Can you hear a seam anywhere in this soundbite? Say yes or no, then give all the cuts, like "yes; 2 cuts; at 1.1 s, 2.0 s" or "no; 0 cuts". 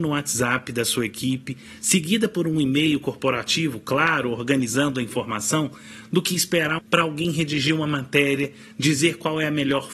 yes; 1 cut; at 6.8 s